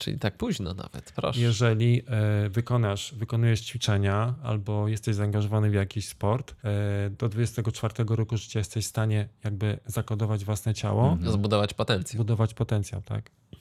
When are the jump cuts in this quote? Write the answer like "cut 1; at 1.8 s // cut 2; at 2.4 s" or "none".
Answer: cut 1; at 6.6 s